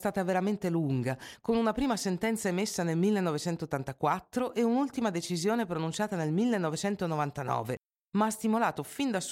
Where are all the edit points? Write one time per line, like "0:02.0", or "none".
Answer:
none